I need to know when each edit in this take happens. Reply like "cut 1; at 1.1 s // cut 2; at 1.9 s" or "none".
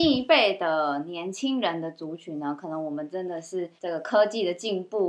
cut 1; at 3.8 s